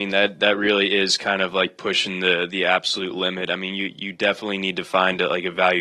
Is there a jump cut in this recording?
no; 0 cuts

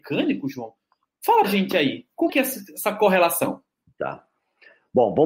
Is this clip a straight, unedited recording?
no; 2 cuts; at 1.4 s, 2.3 s

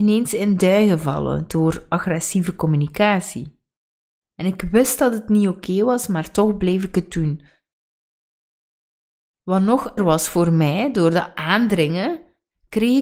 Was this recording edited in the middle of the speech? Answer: yes; 1 cut; at 10.0 s

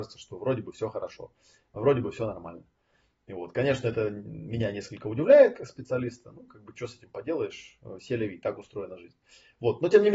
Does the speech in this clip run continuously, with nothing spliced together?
yes; 0 cuts

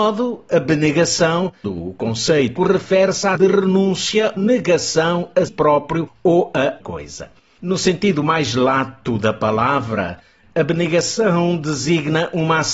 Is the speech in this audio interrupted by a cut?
yes; 6 cuts; at 1.6 s, 2.6 s, 3.3 s, 4.4 s, 5.5 s, 6.8 s

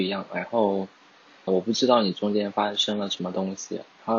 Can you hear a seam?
yes; 1 cut; at 1.5 s

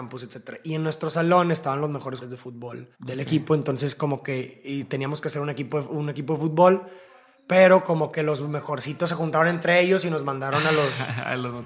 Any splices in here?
yes; 2 cuts; at 2.2 s, 2.9 s

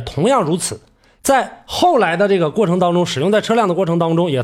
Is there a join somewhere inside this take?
no; 0 cuts

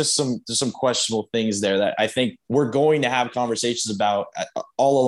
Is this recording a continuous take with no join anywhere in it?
no; 1 cut; at 2.4 s

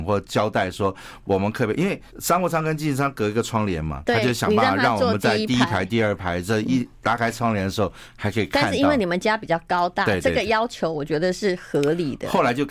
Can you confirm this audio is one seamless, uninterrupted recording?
no; 1 cut; at 2.1 s

